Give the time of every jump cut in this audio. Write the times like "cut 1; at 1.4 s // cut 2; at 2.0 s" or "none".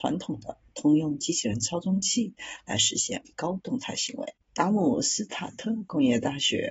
cut 1; at 4.4 s